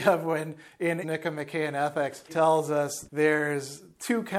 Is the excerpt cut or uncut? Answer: cut